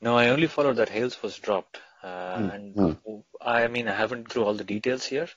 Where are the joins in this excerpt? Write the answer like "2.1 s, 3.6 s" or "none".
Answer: 4.3 s